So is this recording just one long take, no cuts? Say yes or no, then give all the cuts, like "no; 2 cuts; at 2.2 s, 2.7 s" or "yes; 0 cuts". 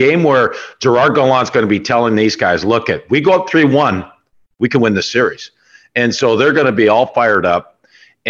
yes; 0 cuts